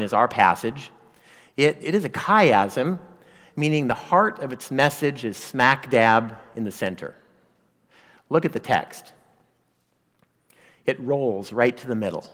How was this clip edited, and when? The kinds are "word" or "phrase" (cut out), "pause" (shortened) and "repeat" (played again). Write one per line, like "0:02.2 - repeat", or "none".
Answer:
none